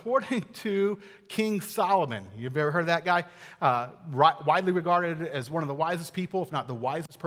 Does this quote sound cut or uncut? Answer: uncut